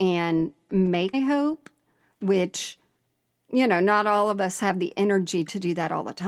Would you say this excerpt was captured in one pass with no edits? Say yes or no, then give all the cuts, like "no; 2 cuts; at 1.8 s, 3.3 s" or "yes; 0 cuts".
no; 1 cut; at 1.1 s